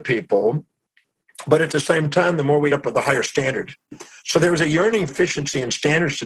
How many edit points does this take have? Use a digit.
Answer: 2